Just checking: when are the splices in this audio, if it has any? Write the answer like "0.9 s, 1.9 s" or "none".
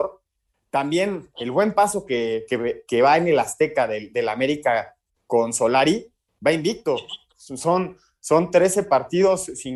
none